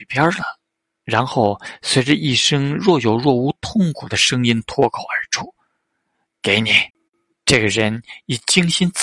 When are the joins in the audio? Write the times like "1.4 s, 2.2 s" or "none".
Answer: 6.9 s